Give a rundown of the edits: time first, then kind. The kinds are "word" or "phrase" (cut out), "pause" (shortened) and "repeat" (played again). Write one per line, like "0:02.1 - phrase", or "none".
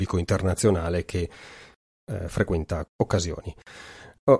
0:02.9 - word